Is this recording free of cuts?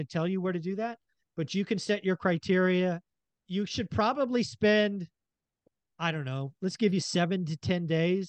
yes; 0 cuts

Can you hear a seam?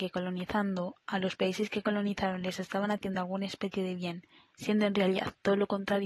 no; 0 cuts

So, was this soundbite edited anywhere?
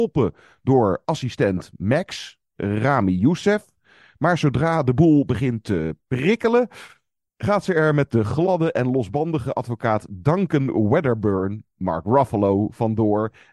no; 0 cuts

